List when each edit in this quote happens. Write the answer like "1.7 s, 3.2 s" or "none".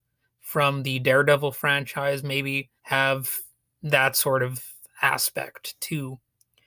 2.8 s